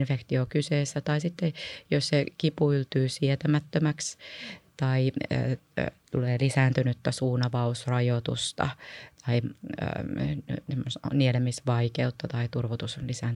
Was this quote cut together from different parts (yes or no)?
no